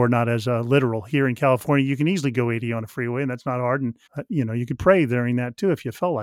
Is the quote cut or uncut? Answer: cut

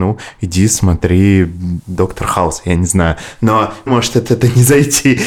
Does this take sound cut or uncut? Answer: cut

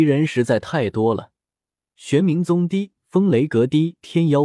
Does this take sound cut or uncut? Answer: uncut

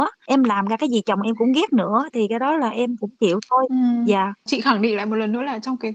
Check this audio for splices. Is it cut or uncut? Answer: uncut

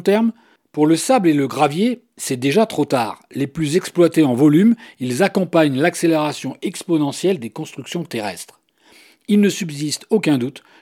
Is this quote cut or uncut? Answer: uncut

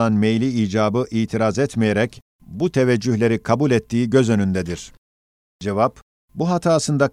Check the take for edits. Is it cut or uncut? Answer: uncut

